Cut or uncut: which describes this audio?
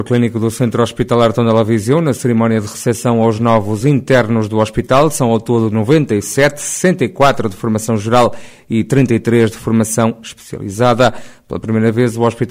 uncut